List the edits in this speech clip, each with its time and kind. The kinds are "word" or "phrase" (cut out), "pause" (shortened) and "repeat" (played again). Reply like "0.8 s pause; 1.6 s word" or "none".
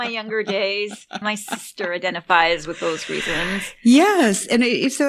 1.2 s word